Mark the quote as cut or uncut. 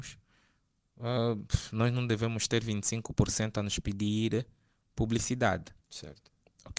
uncut